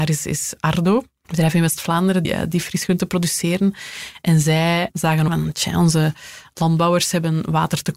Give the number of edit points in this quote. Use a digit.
2